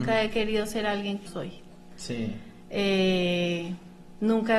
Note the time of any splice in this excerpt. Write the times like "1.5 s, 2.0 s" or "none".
1.3 s